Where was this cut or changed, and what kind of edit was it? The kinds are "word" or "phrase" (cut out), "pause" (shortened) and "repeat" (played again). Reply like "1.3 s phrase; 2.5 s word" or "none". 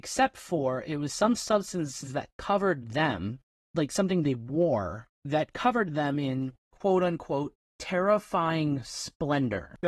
3.5 s pause; 5.1 s pause; 6.6 s pause